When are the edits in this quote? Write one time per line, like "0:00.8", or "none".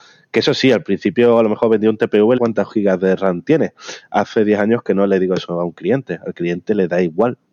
0:02.4